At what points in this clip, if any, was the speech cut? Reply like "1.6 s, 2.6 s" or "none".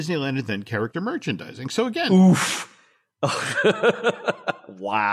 none